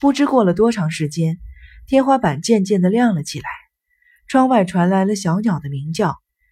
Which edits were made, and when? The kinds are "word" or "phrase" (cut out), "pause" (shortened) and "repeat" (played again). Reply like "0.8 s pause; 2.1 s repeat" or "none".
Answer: none